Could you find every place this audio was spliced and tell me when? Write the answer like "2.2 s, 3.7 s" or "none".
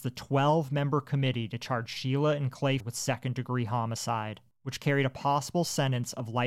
2.8 s